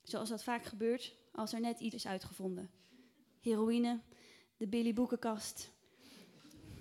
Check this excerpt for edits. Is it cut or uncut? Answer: cut